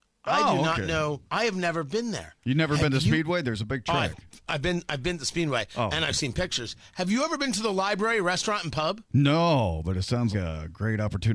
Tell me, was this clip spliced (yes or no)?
yes